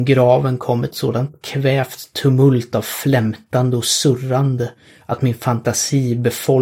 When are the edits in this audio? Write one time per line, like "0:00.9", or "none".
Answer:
none